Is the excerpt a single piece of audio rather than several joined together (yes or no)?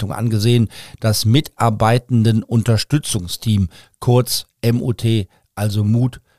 yes